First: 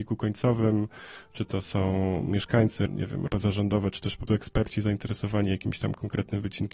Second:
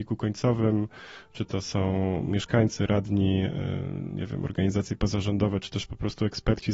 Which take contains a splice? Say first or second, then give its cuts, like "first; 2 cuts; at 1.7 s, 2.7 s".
first; 3 cuts; at 2.9 s, 3.3 s, 4.3 s